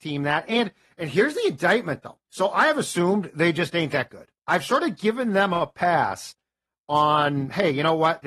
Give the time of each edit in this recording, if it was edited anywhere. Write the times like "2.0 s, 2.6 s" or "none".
2.2 s, 4.4 s